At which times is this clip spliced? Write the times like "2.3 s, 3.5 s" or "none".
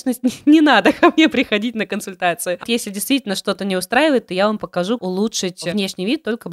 2.6 s, 5.0 s